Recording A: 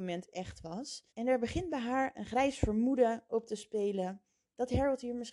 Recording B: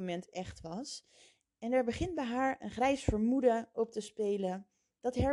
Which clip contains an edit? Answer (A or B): A